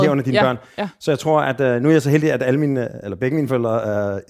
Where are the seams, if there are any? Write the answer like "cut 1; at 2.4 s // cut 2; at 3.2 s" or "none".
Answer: none